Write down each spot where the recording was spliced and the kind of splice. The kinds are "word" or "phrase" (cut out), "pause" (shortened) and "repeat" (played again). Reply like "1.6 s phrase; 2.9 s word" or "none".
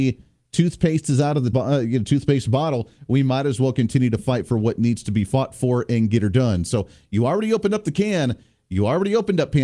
1.5 s word